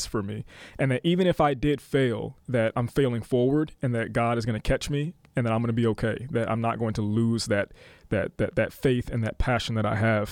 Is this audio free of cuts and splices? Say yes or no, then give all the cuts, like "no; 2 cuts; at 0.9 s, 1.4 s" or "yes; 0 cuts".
yes; 0 cuts